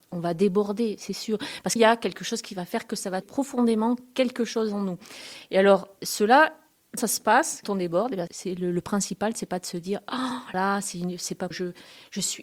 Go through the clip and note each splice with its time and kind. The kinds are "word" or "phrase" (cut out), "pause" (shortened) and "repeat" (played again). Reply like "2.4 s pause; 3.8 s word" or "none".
1.8 s word; 3.2 s word; 6.0 s word; 7.0 s word; 7.6 s word; 8.3 s word; 10.5 s word; 11.5 s word